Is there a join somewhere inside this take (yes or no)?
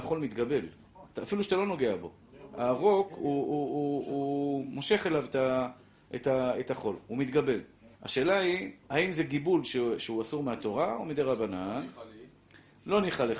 yes